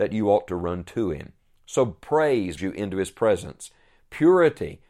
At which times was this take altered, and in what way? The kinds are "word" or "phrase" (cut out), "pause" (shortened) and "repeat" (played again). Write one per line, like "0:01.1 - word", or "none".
0:02.6 - word